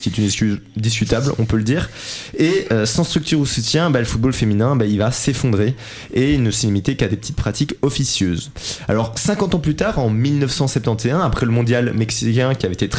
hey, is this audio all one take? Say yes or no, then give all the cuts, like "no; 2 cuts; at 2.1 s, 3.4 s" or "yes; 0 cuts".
yes; 0 cuts